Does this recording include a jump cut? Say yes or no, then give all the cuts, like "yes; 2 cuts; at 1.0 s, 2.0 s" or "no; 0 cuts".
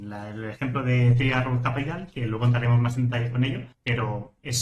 yes; 1 cut; at 3.7 s